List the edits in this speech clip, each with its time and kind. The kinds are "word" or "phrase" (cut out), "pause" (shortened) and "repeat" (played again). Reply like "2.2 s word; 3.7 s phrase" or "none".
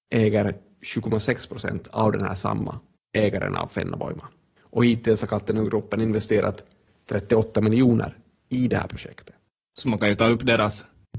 none